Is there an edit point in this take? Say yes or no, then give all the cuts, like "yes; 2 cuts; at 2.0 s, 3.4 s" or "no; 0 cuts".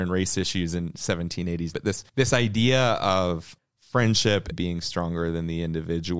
yes; 4 cuts; at 1.7 s, 2.1 s, 3.6 s, 4.5 s